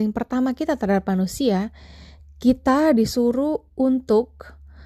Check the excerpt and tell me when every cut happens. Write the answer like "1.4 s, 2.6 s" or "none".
none

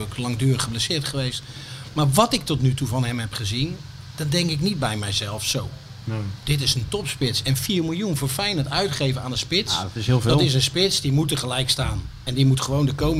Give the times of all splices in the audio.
none

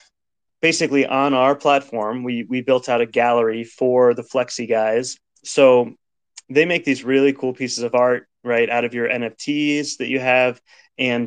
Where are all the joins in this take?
none

